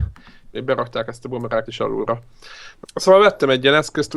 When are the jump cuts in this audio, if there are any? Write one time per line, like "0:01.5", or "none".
0:01.7
0:02.8